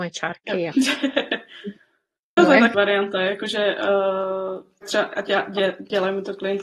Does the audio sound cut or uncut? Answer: cut